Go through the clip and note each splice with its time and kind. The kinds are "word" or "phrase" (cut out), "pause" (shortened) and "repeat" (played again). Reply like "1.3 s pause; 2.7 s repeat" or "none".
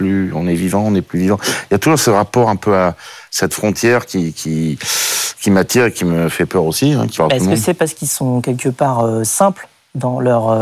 7.2 s word

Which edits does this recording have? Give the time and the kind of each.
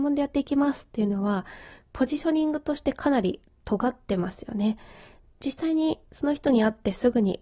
none

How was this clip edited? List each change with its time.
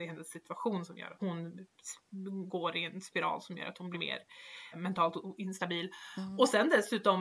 1.2 s word; 3.9 s word; 4.7 s word

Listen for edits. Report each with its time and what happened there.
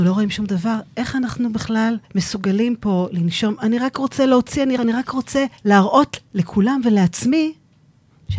2.0 s pause; 4.8 s phrase; 5.6 s pause

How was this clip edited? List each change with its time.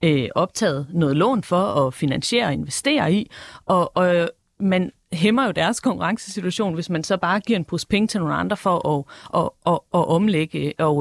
none

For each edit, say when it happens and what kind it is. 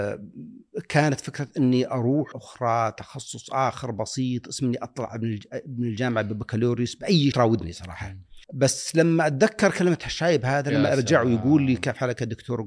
2.3 s word; 7.3 s phrase; 8.4 s pause

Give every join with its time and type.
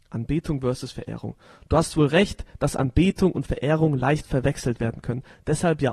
none

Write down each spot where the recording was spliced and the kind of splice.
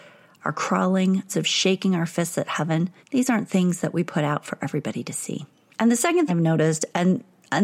1.3 s phrase; 3.0 s pause; 5.5 s pause; 6.3 s word

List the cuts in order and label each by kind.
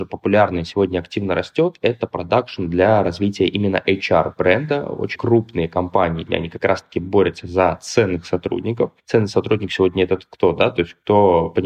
5.2 s word; 6.3 s word; 9.0 s pause

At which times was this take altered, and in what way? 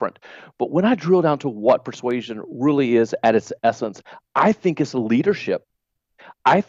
none

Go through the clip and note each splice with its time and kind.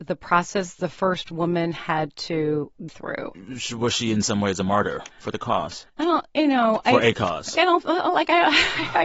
2.9 s word; 5.1 s pause; 5.9 s pause; 7.6 s word

